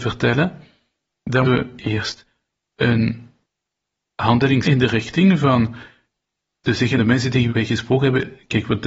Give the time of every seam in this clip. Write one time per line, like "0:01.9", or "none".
0:01.4
0:04.6
0:07.0
0:07.5